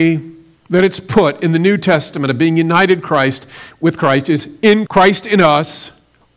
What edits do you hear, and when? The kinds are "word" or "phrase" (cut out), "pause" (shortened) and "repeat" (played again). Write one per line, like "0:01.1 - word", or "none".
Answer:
0:04.9 - word